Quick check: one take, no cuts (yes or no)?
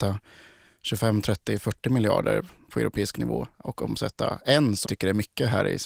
no